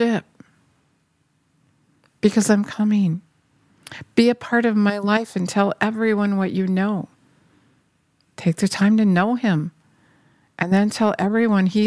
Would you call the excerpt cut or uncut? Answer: uncut